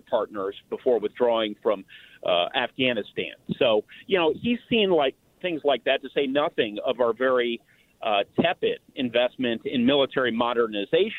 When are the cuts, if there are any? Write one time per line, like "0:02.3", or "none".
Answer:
none